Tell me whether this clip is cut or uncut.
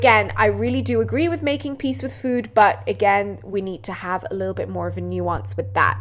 uncut